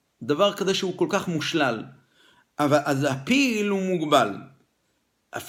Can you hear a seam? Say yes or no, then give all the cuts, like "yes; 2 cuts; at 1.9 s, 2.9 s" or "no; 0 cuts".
no; 0 cuts